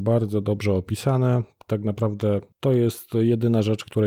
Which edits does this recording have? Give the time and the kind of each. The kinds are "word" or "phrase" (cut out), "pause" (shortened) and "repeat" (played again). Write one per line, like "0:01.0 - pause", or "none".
none

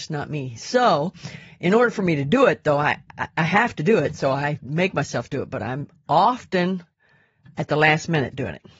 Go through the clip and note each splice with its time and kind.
none

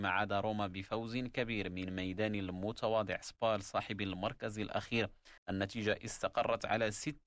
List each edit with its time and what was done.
0:05.4 - pause

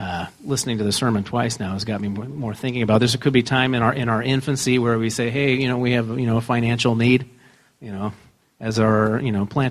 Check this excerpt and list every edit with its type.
none

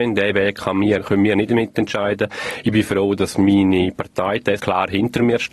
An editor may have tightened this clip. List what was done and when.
0:04.6 - word

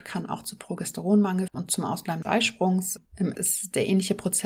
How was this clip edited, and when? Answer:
0:01.5 - word
0:02.2 - word
0:03.3 - word

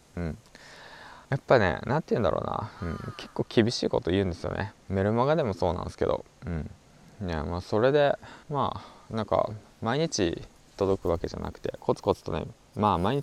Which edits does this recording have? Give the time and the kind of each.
0:01.2 - pause
0:08.4 - pause

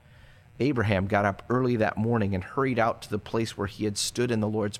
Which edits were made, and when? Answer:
none

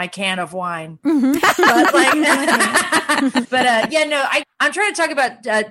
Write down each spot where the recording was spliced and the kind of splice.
0:03.4 - word
0:04.4 - word

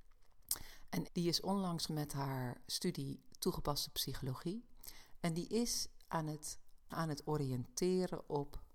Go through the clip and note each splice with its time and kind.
0:01.1 - word
0:01.9 - word
0:06.9 - word

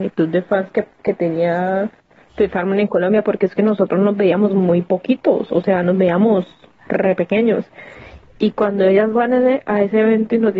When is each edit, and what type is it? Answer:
none

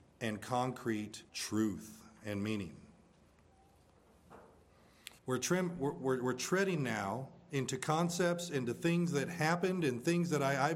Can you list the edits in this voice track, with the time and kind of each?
0:01.3 - pause
0:05.2 - pause

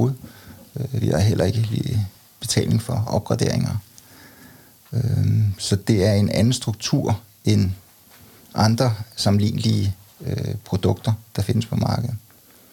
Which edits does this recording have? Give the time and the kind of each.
none

